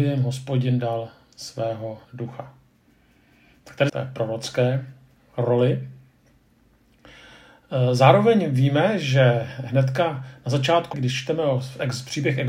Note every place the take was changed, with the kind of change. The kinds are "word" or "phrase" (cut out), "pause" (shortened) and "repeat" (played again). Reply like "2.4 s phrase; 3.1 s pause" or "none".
2.0 s pause; 3.9 s phrase; 10.9 s word